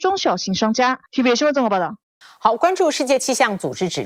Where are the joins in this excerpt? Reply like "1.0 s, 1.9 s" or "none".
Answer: 1.1 s, 2.2 s